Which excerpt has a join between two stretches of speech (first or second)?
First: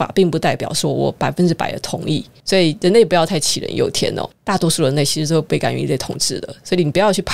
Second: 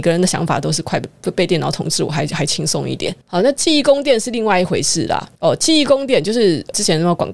second